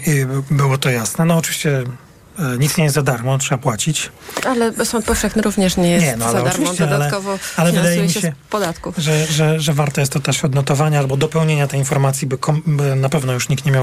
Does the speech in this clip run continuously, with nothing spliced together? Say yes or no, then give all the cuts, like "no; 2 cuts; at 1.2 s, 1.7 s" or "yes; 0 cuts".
yes; 0 cuts